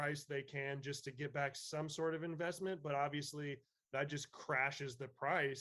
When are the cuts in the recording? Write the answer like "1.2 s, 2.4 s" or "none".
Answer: none